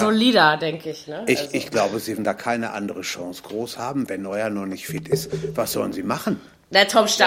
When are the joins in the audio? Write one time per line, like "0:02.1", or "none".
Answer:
0:02.2
0:04.1